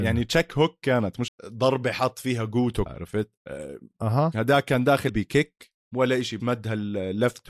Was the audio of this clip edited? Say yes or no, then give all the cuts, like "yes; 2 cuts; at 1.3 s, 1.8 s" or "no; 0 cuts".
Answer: yes; 6 cuts; at 1.3 s, 2.9 s, 3.4 s, 5.1 s, 5.8 s, 6.4 s